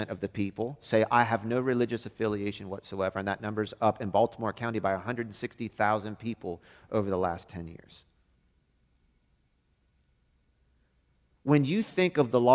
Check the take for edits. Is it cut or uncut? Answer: uncut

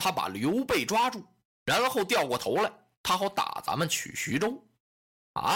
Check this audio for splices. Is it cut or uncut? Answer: uncut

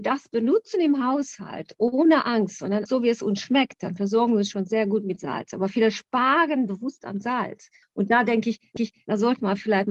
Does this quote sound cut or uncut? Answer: cut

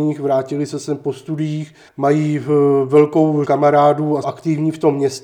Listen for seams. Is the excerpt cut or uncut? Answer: cut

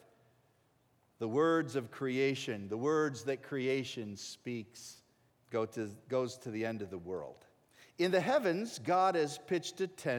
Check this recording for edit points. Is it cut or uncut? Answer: cut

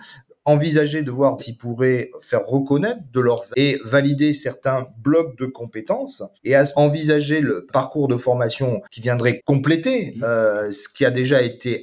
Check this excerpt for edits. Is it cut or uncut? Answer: cut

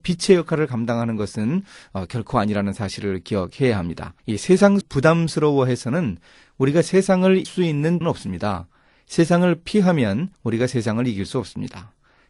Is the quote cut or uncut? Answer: cut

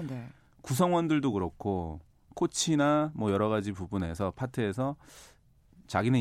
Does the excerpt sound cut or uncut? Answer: uncut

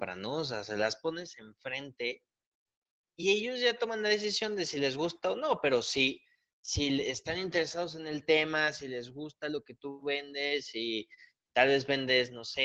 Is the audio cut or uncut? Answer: uncut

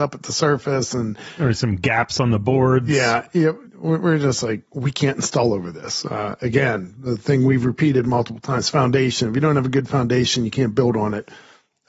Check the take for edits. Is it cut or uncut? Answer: cut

